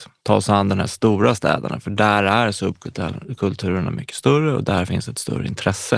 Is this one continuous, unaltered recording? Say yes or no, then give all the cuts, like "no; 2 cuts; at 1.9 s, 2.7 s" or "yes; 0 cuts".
yes; 0 cuts